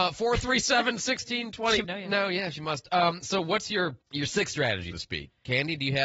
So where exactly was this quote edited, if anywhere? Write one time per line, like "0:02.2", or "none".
0:01.8
0:04.0
0:04.9